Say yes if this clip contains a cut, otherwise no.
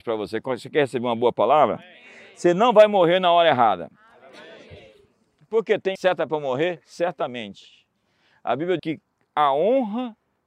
yes